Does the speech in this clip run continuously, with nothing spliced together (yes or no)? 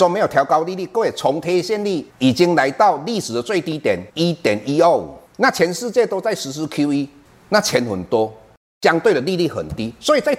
no